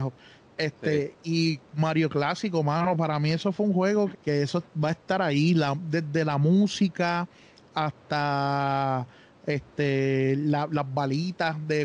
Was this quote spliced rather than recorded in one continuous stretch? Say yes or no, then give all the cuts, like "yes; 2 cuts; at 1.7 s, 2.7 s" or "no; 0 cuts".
yes; 1 cut; at 4.1 s